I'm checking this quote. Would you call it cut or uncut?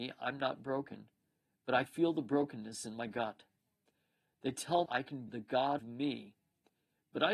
cut